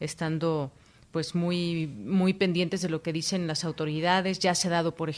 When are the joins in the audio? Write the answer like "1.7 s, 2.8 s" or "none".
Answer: none